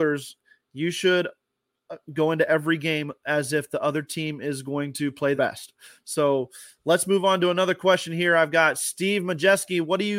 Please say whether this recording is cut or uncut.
cut